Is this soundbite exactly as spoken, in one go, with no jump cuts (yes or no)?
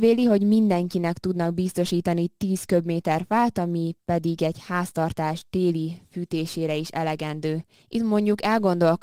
no